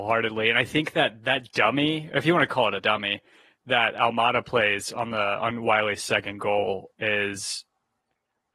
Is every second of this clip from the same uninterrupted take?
yes; 0 cuts

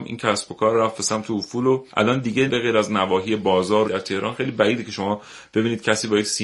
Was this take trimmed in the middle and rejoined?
yes; 3 cuts; at 1.9 s, 2.5 s, 3.9 s

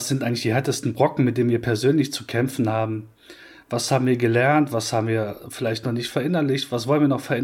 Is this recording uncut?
yes; 0 cuts

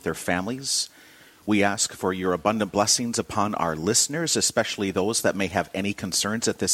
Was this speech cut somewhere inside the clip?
no; 0 cuts

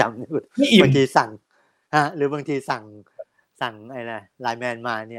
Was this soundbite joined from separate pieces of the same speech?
no; 0 cuts

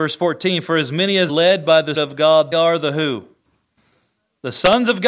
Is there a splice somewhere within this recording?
yes; 3 cuts; at 1.3 s, 1.9 s, 2.5 s

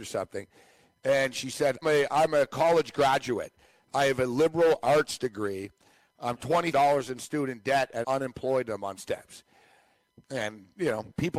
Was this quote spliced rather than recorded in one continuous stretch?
yes; 4 cuts; at 1.8 s, 6.7 s, 8.0 s, 9.0 s

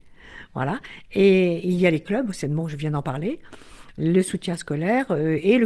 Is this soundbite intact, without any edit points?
yes; 0 cuts

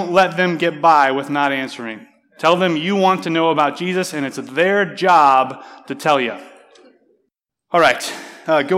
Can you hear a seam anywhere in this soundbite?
no; 0 cuts

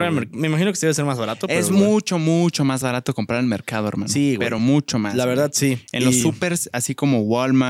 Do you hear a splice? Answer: no; 0 cuts

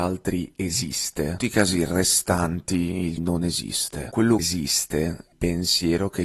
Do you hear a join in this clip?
yes; 4 cuts; at 1.4 s, 3.2 s, 4.4 s, 5.3 s

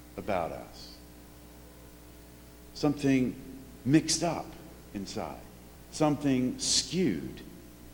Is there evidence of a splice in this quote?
yes; 1 cut; at 5.8 s

